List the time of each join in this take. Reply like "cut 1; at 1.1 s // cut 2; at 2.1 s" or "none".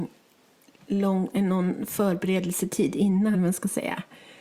cut 1; at 3.3 s